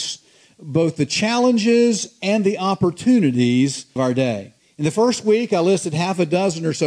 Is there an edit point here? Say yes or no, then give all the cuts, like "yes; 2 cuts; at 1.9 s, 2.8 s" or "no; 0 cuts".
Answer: yes; 2 cuts; at 4.0 s, 4.6 s